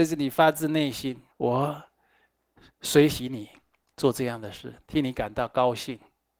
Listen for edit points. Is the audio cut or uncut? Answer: cut